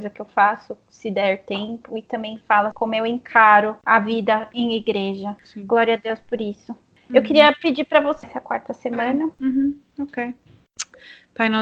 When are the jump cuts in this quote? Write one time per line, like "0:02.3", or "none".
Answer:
0:02.7
0:08.2